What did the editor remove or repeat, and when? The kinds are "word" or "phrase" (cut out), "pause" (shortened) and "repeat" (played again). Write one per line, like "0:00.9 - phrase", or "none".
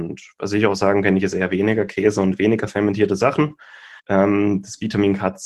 0:04.0 - pause